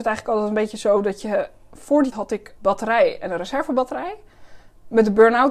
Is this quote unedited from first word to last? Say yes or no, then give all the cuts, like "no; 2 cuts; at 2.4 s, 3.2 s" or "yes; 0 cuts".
no; 2 cuts; at 2.1 s, 2.6 s